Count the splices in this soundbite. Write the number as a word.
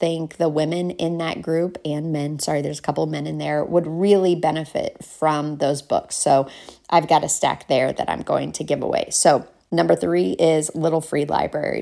zero